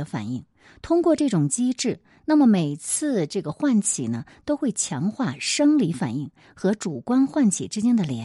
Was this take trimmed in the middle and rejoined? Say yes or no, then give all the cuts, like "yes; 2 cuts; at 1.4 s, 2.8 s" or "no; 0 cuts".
no; 0 cuts